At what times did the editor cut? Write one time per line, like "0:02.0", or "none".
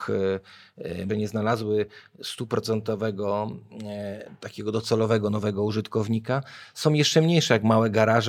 0:01.1